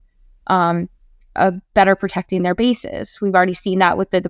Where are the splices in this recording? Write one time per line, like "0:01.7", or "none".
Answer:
none